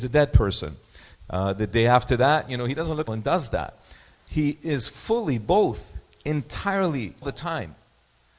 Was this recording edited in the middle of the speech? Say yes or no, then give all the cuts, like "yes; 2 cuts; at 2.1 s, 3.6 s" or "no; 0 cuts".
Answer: yes; 2 cuts; at 3.1 s, 7.2 s